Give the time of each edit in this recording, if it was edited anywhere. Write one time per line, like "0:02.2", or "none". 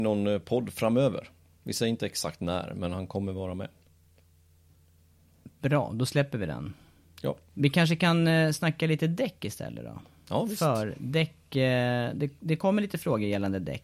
none